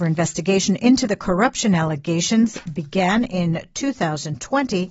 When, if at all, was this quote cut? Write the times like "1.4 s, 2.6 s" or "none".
none